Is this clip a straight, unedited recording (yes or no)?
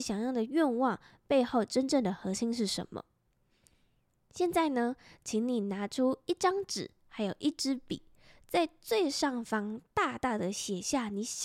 yes